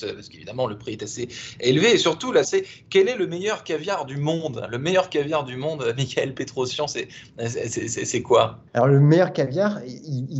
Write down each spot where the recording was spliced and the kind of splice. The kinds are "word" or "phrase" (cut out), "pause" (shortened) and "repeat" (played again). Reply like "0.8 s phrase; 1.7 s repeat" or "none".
2.4 s word; 8.7 s pause